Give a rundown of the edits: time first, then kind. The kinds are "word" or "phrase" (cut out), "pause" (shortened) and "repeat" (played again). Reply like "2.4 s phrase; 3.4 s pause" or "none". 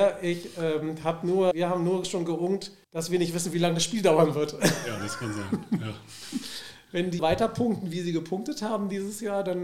1.5 s word; 2.8 s pause; 7.2 s word